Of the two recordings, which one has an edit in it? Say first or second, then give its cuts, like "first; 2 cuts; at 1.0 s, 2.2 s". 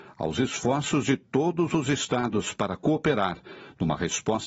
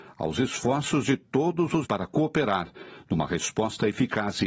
second; 1 cut; at 1.8 s